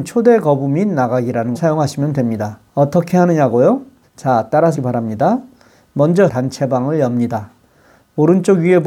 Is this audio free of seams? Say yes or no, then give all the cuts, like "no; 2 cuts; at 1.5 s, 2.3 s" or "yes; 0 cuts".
no; 5 cuts; at 1.5 s, 2.7 s, 4.0 s, 4.7 s, 6.3 s